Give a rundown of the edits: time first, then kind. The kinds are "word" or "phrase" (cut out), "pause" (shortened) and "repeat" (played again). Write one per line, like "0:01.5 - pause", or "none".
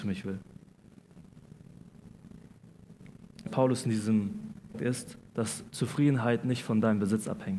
0:03.5 - word
0:04.7 - phrase
0:05.3 - pause